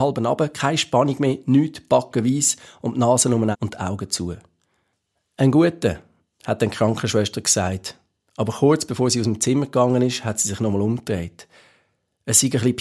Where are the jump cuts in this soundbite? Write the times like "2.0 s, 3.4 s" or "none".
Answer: 3.5 s